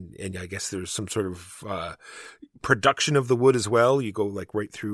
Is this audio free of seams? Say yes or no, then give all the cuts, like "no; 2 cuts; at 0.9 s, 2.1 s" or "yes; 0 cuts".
yes; 0 cuts